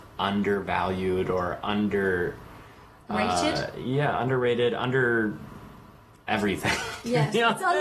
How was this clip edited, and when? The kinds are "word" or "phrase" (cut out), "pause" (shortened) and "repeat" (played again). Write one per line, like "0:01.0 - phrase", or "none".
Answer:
none